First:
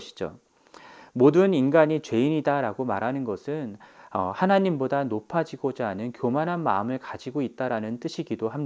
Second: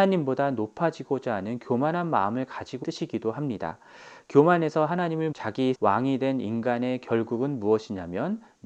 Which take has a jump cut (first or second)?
second